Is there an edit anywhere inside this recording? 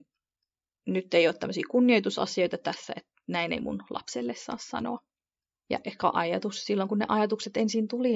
no; 0 cuts

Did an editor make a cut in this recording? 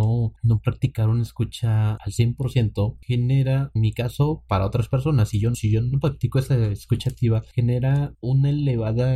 yes; 4 cuts; at 2.0 s, 3.8 s, 5.5 s, 5.9 s

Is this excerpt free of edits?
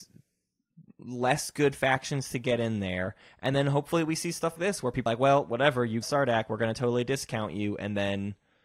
no; 3 cuts; at 4.6 s, 5.1 s, 6.0 s

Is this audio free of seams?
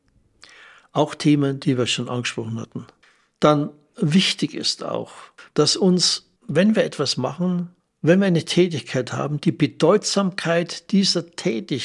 no; 4 cuts; at 3.0 s, 5.4 s, 6.4 s, 7.8 s

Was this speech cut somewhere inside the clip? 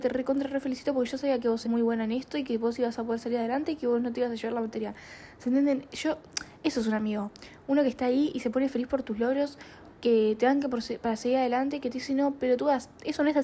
yes; 1 cut; at 1.6 s

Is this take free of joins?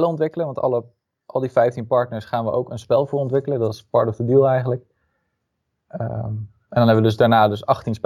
yes; 0 cuts

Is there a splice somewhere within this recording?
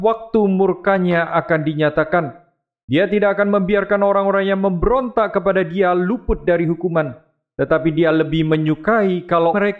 no; 0 cuts

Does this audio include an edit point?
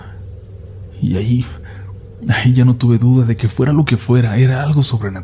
no; 0 cuts

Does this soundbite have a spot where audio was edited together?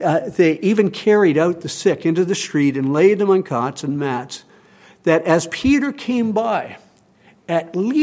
no; 0 cuts

